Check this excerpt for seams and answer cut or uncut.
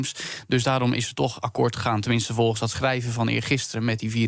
uncut